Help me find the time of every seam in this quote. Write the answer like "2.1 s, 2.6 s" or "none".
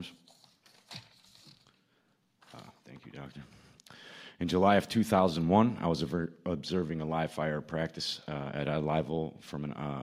none